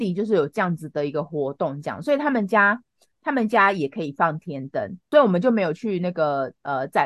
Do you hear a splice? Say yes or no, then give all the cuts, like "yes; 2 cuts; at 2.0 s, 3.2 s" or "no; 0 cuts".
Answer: no; 0 cuts